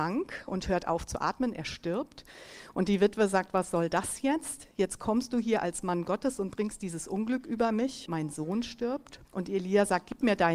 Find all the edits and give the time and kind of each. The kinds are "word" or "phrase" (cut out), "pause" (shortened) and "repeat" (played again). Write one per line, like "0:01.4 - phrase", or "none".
0:08.1 - word
0:09.2 - pause